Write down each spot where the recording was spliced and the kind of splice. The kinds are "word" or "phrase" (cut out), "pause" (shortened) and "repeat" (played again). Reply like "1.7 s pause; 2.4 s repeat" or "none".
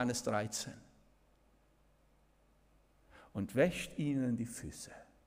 none